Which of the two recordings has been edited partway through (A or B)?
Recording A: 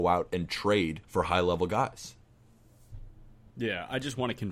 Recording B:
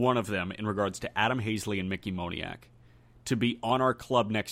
A